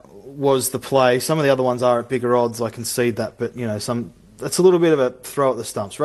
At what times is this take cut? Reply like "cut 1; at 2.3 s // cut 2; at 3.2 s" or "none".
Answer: none